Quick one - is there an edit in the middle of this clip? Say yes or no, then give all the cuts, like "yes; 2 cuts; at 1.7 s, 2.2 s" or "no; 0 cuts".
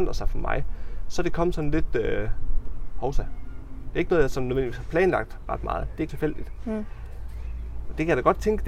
yes; 1 cut; at 6.1 s